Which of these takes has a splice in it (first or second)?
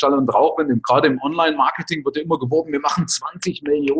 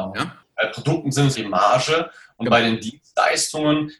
second